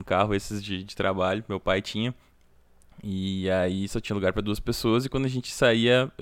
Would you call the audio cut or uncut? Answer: uncut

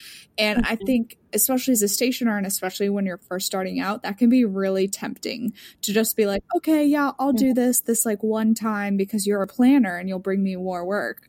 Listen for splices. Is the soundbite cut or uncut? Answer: uncut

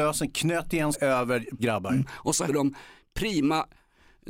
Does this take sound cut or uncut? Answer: cut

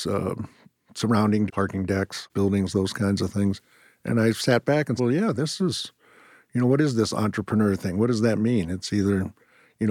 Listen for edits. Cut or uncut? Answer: cut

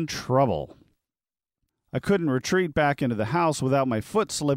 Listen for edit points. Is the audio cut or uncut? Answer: uncut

